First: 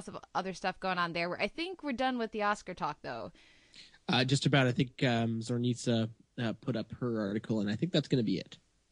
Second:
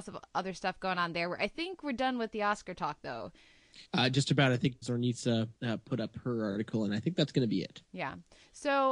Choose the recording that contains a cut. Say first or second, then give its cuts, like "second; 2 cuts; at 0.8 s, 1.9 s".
second; 4 cuts; at 3.8 s, 4.8 s, 5.6 s, 7.8 s